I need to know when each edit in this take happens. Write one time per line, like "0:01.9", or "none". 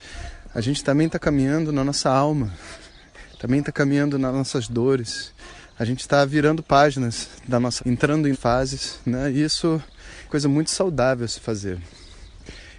0:07.8
0:08.3
0:10.3

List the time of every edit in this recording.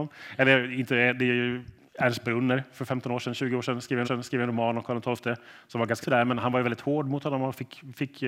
0:04.0
0:06.0

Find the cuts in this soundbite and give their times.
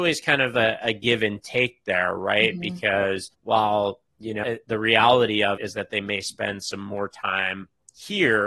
0:03.3
0:04.4
0:05.6

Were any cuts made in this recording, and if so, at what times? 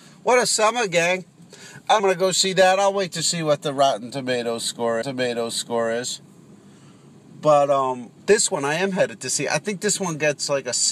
0:02.0
0:05.0
0:08.2

